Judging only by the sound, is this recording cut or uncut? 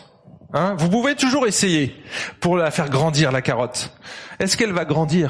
uncut